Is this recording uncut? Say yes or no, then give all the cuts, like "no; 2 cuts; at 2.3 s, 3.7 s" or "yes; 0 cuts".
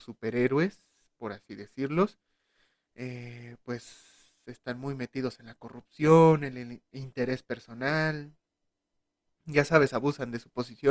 yes; 0 cuts